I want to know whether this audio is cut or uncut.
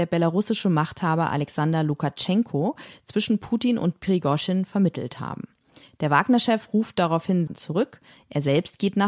cut